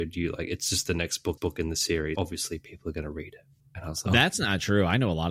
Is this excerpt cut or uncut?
cut